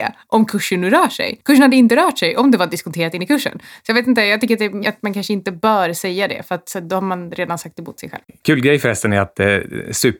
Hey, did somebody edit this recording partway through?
yes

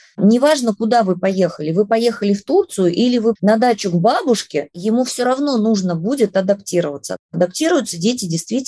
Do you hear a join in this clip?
yes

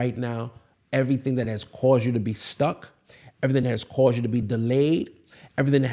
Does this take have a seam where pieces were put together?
no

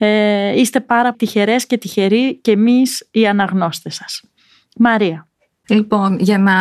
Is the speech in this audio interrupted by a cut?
yes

